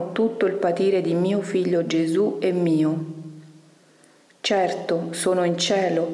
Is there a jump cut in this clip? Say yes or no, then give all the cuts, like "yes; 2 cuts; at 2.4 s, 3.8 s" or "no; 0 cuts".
no; 0 cuts